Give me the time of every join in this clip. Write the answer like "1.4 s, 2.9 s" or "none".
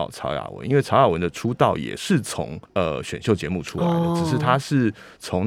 2.6 s